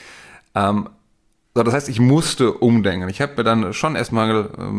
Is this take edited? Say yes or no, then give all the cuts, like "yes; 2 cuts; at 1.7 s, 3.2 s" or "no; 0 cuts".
no; 0 cuts